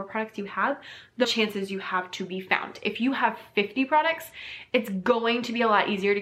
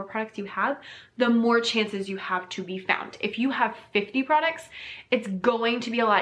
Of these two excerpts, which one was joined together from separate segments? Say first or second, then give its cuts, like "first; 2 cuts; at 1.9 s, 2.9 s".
first; 1 cut; at 1.2 s